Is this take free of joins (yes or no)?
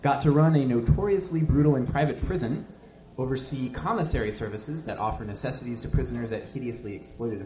no